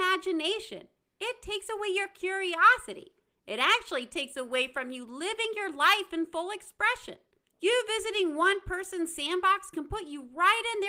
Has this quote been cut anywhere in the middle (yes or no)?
no